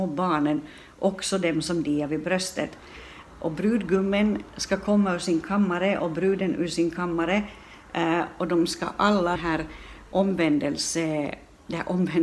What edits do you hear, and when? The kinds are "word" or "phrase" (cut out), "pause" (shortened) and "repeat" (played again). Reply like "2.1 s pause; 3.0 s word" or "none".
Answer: 9.4 s phrase